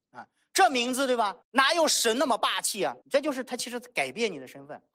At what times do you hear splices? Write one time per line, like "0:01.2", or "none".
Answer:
0:01.4
0:03.0